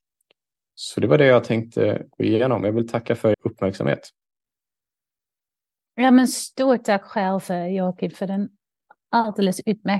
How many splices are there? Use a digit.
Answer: 1